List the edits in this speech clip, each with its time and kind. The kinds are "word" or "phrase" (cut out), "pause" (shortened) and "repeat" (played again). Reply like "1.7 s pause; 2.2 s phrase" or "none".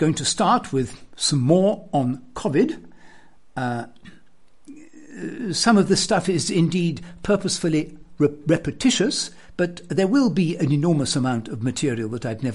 none